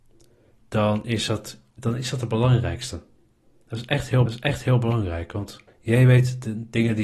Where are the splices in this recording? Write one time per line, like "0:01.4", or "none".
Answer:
0:03.2
0:04.3
0:05.7